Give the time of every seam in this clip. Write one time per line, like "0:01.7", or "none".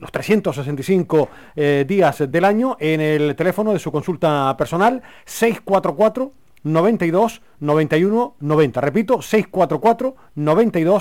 0:02.3